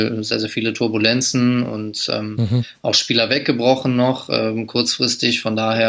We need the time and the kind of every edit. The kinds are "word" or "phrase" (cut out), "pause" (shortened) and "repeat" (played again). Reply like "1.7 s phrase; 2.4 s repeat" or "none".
none